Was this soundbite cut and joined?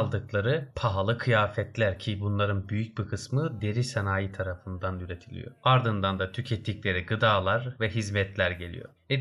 no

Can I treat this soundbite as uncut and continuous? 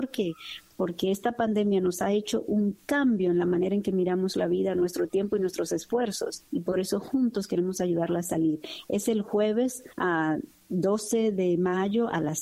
no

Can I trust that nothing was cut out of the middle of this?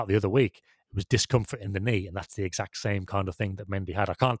yes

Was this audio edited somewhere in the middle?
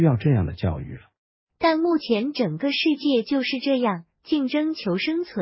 yes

